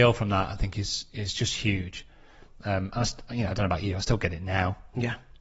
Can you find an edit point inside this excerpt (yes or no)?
no